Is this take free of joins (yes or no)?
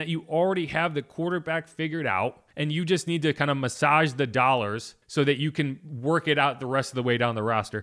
no